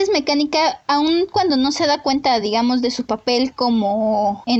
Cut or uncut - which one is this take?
uncut